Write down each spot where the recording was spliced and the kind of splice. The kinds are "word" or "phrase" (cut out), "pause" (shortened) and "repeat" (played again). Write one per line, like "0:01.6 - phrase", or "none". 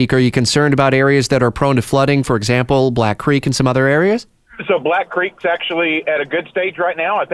none